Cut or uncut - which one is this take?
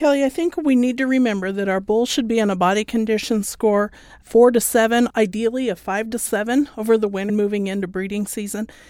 cut